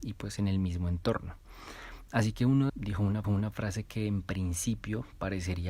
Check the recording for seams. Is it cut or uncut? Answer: cut